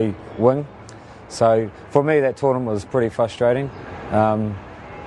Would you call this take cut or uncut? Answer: uncut